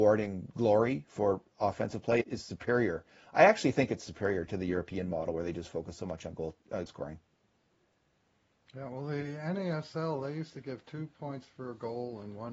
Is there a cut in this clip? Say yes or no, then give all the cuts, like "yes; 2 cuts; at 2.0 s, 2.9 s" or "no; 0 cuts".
yes; 2 cuts; at 2.2 s, 6.9 s